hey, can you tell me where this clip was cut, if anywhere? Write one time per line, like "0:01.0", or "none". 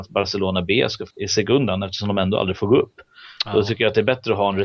0:01.1